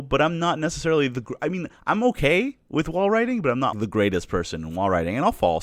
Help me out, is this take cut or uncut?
cut